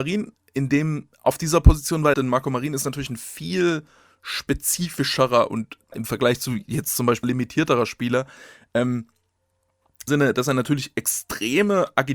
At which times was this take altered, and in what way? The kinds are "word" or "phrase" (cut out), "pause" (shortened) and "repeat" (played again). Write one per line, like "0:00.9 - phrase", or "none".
0:02.1 - word
0:05.9 - word
0:07.2 - word
0:10.1 - word